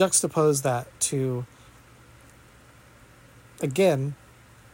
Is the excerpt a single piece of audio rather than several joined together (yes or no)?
yes